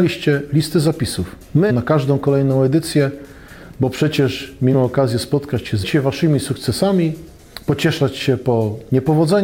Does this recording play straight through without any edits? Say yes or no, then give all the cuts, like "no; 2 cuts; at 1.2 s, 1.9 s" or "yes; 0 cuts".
no; 3 cuts; at 1.7 s, 4.7 s, 5.8 s